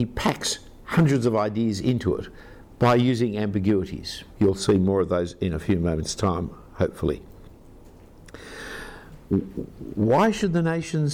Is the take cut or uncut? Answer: cut